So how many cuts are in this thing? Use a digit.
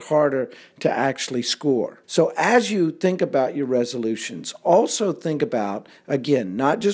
1